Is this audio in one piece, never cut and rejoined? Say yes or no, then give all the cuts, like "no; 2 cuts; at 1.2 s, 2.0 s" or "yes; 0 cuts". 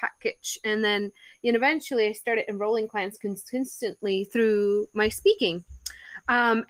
yes; 0 cuts